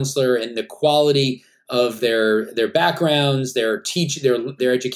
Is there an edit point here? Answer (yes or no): no